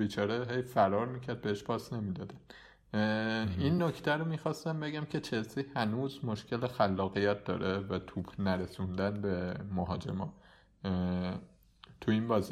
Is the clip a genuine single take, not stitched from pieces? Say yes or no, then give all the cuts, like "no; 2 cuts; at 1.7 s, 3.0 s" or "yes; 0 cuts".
yes; 0 cuts